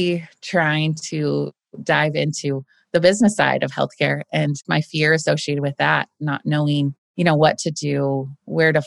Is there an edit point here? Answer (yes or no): yes